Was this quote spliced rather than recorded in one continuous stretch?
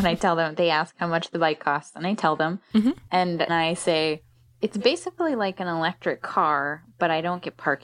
yes; 1 cut; at 3.5 s

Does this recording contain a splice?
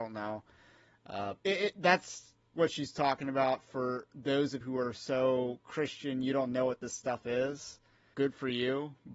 yes; 3 cuts; at 1.4 s, 4.6 s, 8.1 s

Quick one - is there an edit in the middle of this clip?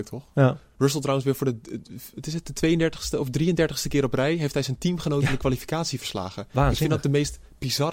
no; 0 cuts

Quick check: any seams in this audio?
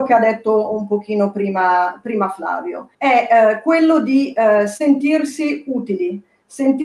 yes; 1 cut; at 2.9 s

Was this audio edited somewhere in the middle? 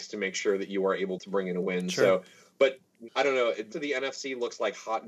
yes; 3 cuts; at 1.2 s, 3.1 s, 3.7 s

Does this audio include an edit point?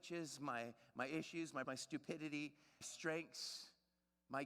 yes; 2 cuts; at 1.6 s, 2.8 s

